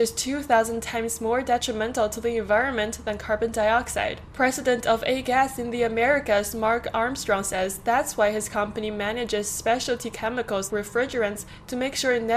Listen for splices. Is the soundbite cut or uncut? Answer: cut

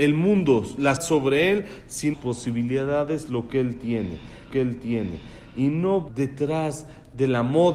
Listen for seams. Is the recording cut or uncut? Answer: cut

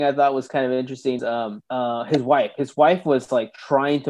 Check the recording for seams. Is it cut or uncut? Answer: cut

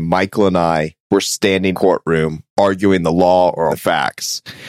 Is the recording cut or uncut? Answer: cut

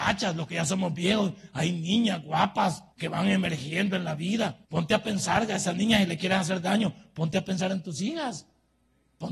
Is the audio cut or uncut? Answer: cut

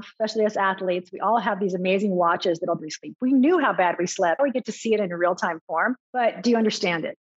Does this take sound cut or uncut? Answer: cut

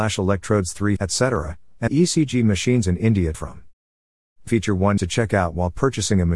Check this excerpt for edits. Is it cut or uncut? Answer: cut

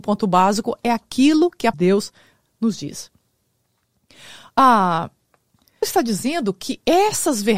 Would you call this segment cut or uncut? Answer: cut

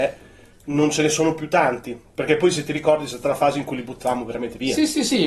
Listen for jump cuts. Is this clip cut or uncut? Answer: uncut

